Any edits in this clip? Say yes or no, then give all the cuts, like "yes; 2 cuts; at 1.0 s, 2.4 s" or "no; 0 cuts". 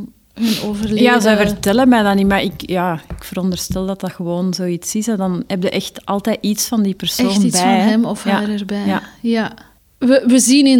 no; 0 cuts